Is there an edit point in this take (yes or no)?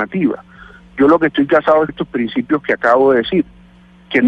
yes